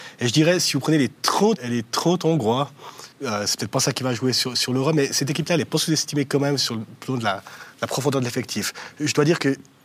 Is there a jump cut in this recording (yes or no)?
yes